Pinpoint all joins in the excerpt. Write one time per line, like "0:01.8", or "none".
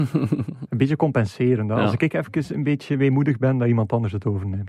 none